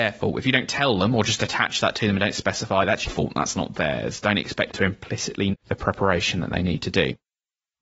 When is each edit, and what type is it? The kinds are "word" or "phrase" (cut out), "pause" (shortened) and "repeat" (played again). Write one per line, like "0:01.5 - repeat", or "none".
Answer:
0:03.1 - word
0:04.7 - word
0:05.5 - word